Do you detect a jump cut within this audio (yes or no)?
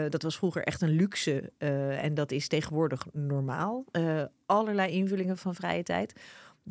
no